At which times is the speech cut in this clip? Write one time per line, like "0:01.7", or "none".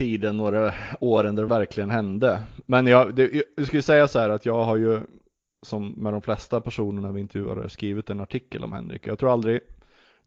0:01.5